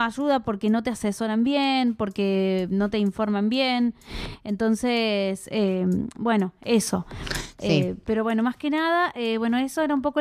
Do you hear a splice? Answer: no; 0 cuts

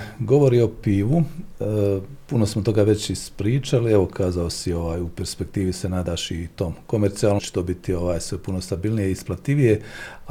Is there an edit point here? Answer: yes; 1 cut; at 7.4 s

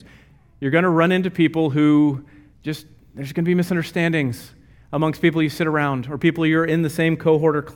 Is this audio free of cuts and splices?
yes; 0 cuts

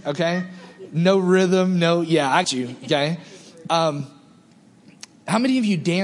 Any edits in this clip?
yes; 1 cut; at 2.4 s

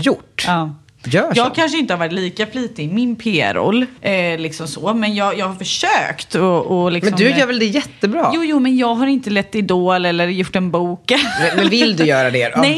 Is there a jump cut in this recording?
yes; 1 cut; at 4.0 s

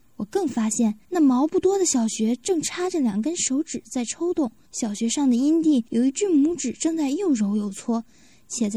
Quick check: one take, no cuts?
no; 3 cuts; at 1.0 s, 4.7 s, 5.9 s

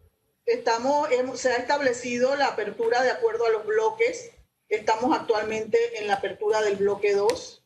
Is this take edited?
no; 0 cuts

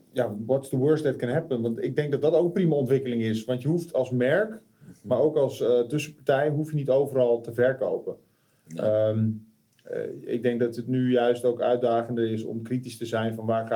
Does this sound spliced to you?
no; 0 cuts

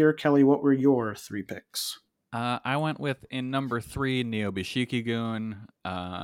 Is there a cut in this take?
no; 0 cuts

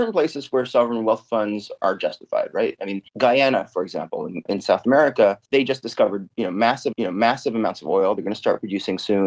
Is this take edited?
yes; 3 cuts; at 3.1 s, 5.5 s, 6.9 s

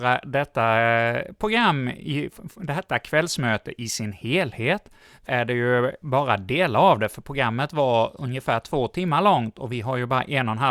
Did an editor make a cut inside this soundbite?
yes; 1 cut; at 5.3 s

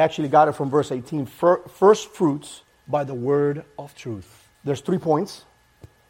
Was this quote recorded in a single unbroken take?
no; 1 cut; at 4.5 s

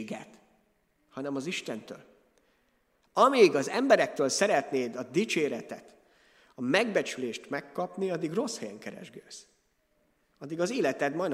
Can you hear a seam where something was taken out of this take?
no; 0 cuts

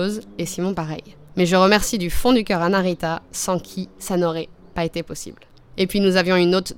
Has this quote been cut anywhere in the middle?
no; 0 cuts

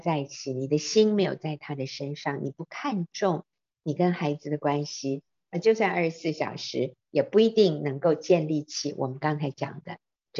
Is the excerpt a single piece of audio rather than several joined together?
yes; 0 cuts

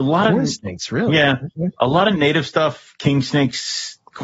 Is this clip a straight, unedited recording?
yes; 0 cuts

